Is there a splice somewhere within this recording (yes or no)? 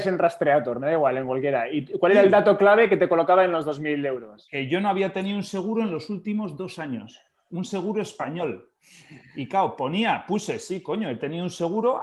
no